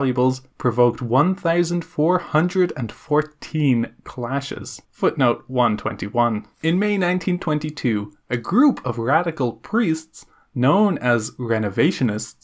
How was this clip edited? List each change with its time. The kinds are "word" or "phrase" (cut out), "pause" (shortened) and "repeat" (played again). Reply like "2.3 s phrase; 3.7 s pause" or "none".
4.8 s pause; 6.5 s pause